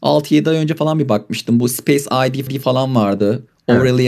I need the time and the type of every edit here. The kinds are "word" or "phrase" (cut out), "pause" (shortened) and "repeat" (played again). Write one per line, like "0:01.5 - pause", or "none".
0:02.5 - repeat